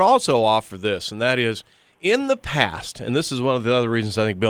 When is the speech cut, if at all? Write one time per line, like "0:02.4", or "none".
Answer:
none